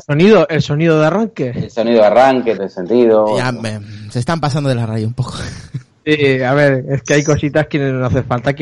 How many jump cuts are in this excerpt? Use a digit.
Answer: 1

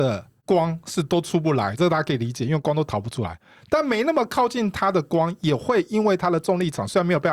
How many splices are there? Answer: 1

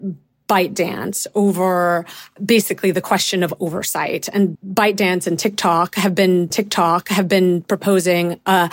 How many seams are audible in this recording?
2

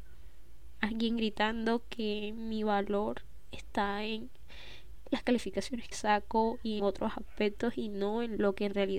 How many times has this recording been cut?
2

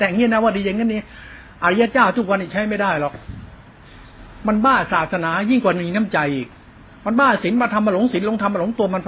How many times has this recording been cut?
0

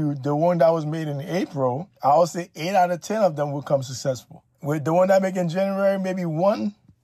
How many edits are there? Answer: 2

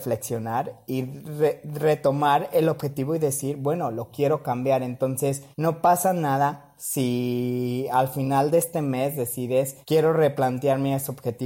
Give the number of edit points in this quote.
2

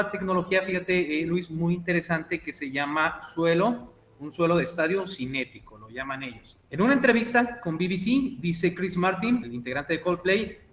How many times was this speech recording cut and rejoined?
2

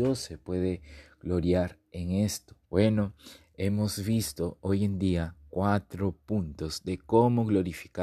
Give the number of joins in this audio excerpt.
1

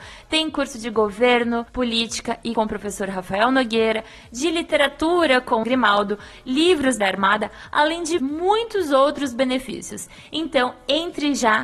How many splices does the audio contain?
5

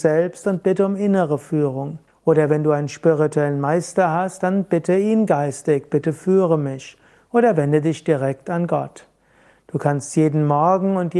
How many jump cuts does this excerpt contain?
1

